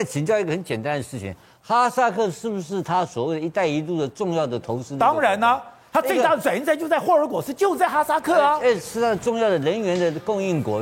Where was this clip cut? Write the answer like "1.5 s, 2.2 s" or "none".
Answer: none